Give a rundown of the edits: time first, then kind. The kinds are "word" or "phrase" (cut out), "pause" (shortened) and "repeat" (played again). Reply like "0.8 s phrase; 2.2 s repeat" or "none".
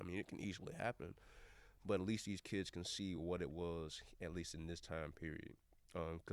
none